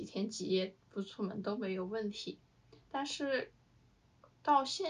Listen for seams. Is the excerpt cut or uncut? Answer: uncut